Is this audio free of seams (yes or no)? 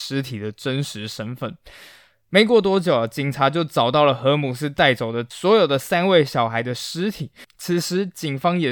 yes